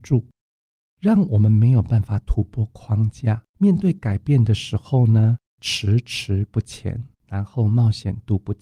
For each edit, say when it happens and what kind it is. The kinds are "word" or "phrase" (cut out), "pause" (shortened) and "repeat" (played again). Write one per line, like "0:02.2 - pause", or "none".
0:03.5 - pause
0:07.1 - pause